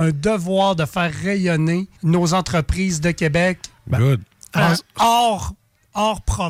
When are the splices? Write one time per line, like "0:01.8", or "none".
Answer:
0:02.0
0:04.6